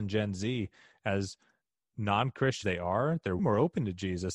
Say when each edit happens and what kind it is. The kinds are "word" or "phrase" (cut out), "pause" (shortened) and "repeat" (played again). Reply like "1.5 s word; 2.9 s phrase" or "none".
2.6 s word; 3.4 s word

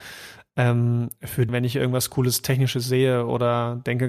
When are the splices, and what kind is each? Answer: 1.5 s word

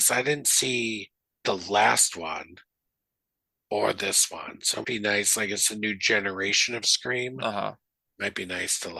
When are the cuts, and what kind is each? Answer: 4.8 s word

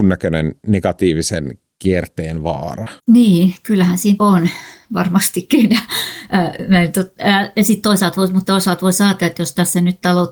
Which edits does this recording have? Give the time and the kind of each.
3.0 s pause; 4.2 s word; 8.5 s word

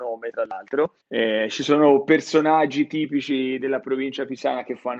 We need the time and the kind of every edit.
1.0 s pause

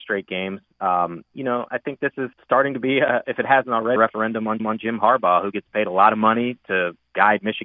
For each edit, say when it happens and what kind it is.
2.3 s pause; 4.0 s word; 4.6 s repeat

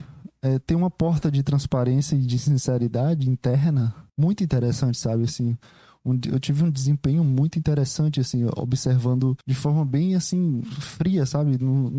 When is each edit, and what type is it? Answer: 4.1 s pause; 9.4 s pause

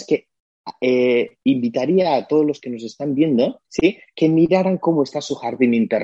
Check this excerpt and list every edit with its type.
1.4 s pause; 3.7 s pause

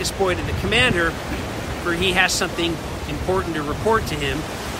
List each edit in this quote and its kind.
none

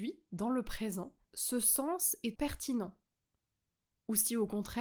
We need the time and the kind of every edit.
1.2 s pause; 2.4 s word

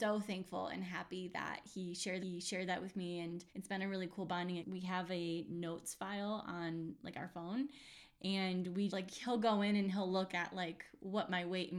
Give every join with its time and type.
2.2 s repeat; 3.5 s pause; 4.6 s phrase; 8.9 s word

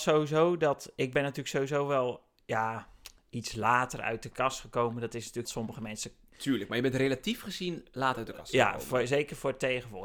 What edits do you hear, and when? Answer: 5.4 s phrase

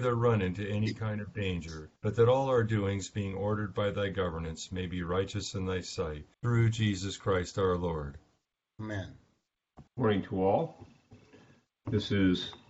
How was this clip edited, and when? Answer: 2.0 s pause; 6.3 s pause; 9.9 s pause

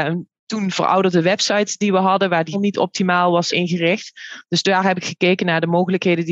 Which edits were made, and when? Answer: 2.5 s word; 3.5 s word

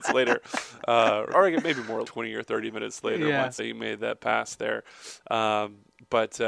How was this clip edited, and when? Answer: 1.3 s word; 2.0 s word; 3.6 s word

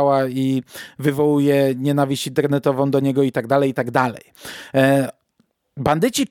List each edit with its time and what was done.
none

